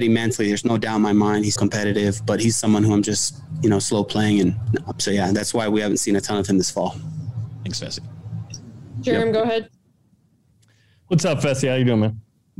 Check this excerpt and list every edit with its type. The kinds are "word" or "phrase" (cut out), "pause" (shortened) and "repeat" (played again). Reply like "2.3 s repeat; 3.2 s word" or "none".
1.6 s word; 4.9 s phrase